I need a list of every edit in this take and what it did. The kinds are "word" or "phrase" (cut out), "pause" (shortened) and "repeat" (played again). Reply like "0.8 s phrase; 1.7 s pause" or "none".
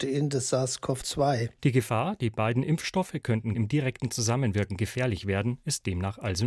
3.5 s word